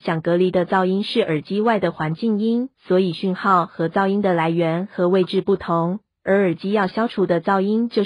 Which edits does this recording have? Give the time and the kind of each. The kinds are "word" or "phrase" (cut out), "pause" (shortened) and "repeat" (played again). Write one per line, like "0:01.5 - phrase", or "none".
0:02.7 - pause